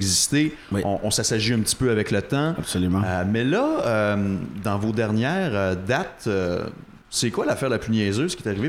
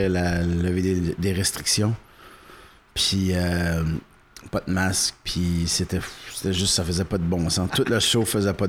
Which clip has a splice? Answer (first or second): first